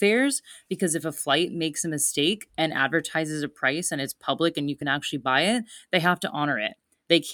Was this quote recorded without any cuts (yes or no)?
yes